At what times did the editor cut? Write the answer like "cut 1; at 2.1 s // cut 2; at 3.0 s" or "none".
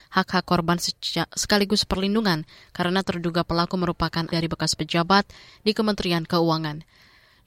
cut 1; at 4.3 s